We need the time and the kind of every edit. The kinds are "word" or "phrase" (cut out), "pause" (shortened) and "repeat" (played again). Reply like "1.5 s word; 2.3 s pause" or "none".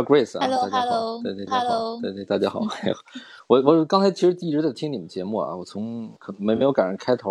1.5 s repeat; 6.2 s pause